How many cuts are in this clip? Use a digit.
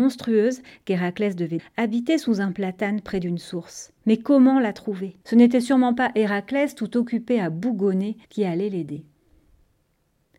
4